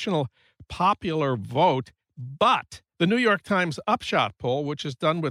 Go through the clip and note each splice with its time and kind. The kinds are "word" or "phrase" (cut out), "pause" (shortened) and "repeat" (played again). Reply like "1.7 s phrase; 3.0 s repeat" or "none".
2.9 s word